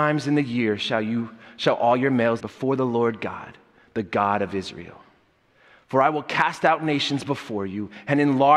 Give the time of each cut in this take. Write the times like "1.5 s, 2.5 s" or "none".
2.4 s

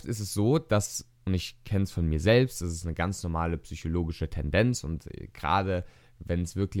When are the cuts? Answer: none

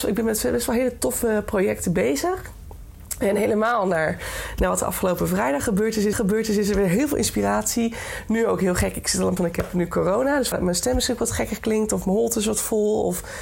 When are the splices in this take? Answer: 6.1 s, 9.4 s, 10.5 s

